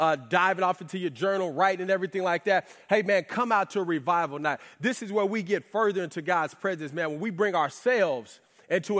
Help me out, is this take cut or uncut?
uncut